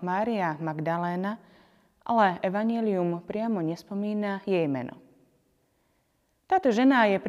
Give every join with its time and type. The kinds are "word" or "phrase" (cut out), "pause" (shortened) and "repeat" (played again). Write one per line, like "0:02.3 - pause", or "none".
none